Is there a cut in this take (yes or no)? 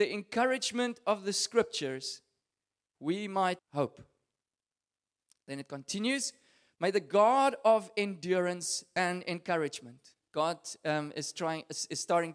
yes